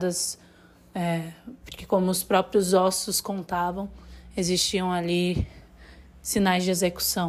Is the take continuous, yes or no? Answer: yes